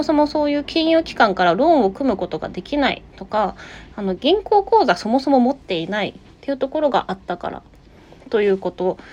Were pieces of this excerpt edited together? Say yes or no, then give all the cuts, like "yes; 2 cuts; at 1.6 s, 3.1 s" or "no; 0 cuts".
yes; 1 cut; at 3.1 s